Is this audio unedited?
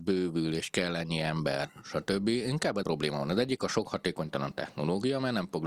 no; 1 cut; at 2.8 s

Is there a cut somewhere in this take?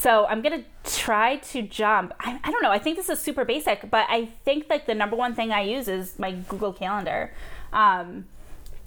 no; 0 cuts

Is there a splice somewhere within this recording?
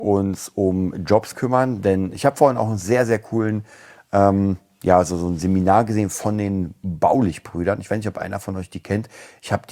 no; 0 cuts

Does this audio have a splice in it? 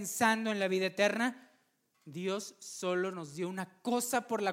no; 0 cuts

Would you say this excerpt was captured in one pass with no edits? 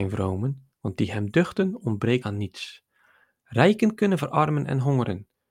no; 1 cut; at 2.2 s

